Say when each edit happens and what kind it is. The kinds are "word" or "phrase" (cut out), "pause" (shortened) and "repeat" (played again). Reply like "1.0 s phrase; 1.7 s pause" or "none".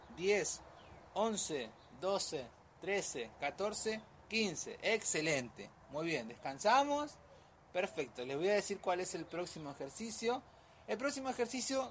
none